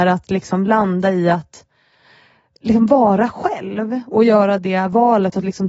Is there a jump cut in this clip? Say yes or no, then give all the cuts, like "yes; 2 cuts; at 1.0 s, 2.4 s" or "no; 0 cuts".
no; 0 cuts